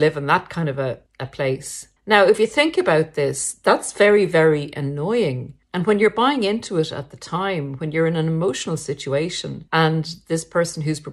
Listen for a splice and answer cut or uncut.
cut